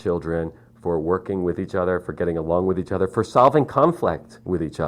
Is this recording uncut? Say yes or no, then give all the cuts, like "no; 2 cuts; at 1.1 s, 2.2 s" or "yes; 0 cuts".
yes; 0 cuts